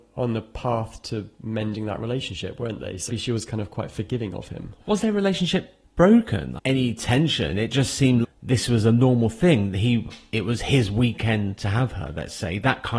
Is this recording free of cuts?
no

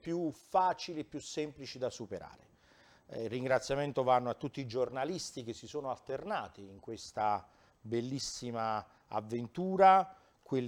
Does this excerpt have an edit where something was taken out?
no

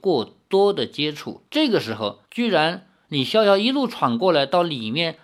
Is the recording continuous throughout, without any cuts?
no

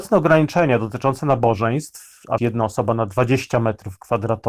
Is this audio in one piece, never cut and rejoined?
no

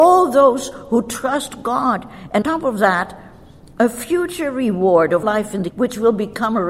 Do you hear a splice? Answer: yes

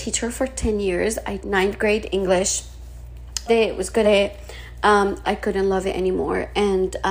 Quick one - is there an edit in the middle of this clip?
yes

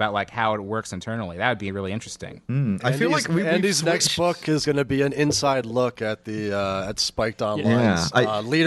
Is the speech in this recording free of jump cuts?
yes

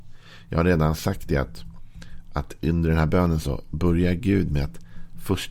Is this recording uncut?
yes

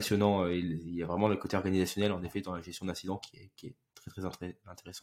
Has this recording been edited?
no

